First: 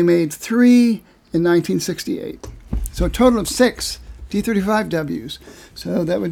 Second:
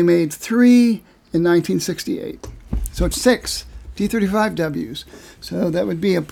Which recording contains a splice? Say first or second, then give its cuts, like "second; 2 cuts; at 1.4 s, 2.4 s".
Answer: second; 1 cut; at 3.1 s